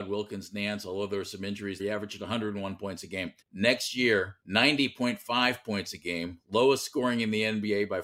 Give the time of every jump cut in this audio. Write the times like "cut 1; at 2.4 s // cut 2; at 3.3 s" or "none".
cut 1; at 1.8 s // cut 2; at 3.4 s // cut 3; at 4.4 s